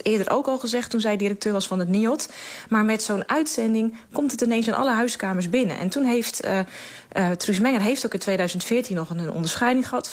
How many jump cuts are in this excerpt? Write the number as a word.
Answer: zero